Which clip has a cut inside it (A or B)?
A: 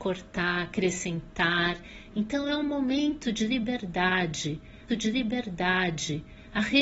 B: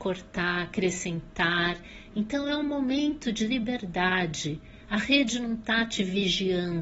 A